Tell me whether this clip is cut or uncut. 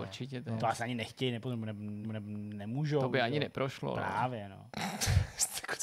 cut